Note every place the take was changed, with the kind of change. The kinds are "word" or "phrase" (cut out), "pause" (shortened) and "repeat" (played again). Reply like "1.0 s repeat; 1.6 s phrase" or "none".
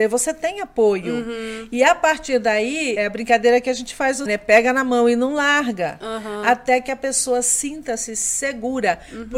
3.0 s word; 4.3 s word